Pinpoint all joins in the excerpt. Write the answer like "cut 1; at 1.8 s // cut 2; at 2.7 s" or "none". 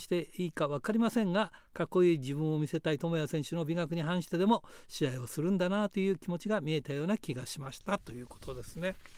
none